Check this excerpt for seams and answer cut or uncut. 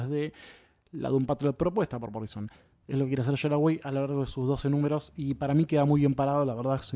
uncut